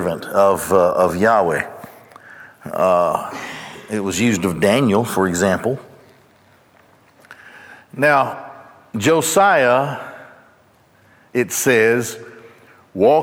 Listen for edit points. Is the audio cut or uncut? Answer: uncut